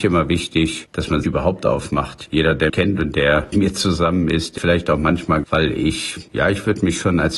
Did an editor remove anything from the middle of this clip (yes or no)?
yes